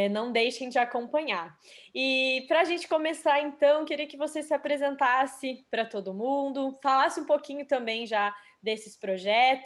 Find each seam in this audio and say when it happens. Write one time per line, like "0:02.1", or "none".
none